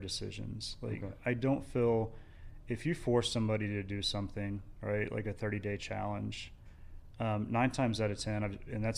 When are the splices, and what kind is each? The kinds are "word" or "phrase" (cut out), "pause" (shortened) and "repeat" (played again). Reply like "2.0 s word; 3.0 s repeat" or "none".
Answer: none